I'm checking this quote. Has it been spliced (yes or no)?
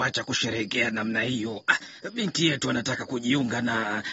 yes